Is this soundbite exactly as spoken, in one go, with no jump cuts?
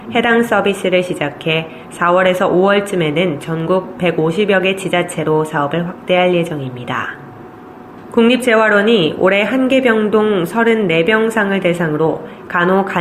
yes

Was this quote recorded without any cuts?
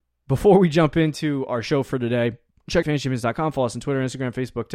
no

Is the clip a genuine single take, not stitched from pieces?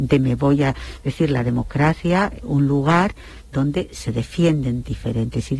no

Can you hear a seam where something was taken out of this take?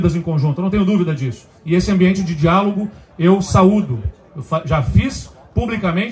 yes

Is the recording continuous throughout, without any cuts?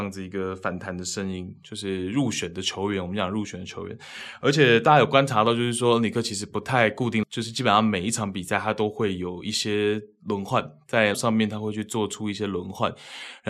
no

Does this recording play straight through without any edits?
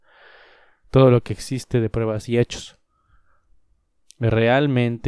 yes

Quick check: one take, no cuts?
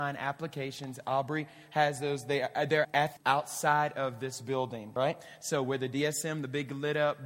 no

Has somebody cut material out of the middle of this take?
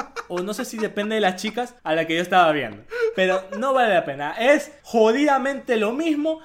yes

